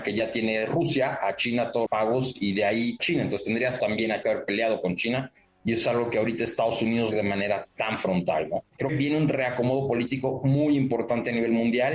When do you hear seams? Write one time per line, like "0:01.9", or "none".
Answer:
0:01.9
0:03.0
0:03.8
0:04.2
0:07.1
0:08.9

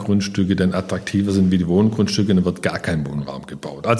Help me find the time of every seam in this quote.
none

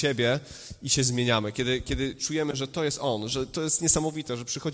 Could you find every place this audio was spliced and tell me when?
none

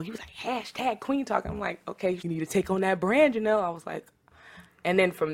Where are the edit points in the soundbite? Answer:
0:02.2

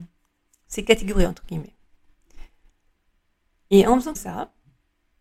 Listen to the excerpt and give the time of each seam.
0:04.1

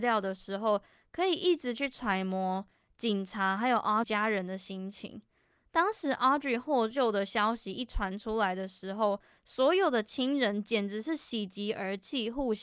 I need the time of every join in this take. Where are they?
0:04.0

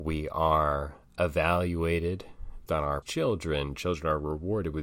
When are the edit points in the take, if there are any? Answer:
0:02.7
0:03.0

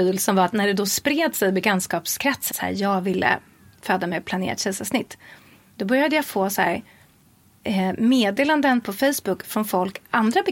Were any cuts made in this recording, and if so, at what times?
0:02.5

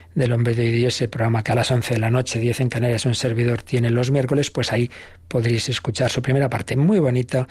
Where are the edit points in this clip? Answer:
none

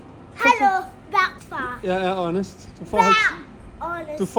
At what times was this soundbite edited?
0:01.4

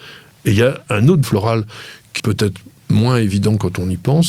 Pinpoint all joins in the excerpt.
0:01.2
0:02.2

